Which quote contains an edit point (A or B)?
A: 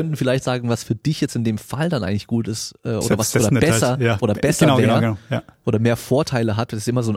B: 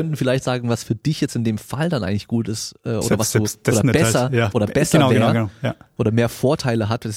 A